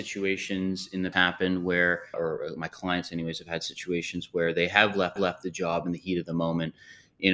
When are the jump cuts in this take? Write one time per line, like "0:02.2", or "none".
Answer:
0:01.1
0:02.1
0:05.2